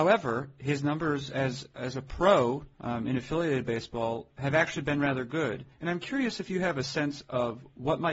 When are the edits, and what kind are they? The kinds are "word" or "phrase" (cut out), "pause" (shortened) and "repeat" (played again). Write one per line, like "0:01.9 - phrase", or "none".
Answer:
0:02.7 - pause
0:05.7 - pause